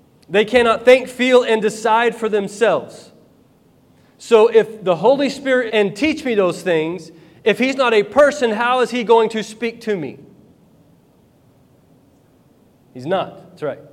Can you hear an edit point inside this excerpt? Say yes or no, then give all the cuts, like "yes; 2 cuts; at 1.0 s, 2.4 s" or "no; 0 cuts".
yes; 1 cut; at 5.7 s